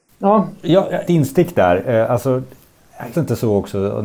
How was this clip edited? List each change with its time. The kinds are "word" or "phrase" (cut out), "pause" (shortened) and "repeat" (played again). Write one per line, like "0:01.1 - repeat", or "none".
0:01.0 - word
0:03.1 - word